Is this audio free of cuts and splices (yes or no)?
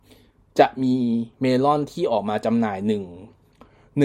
no